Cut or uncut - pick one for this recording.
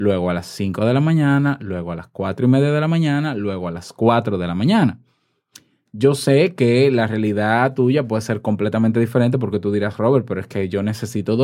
uncut